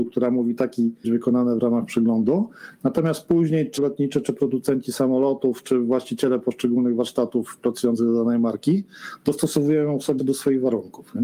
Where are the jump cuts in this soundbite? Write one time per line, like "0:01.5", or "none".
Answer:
0:01.0
0:03.8
0:05.6
0:10.2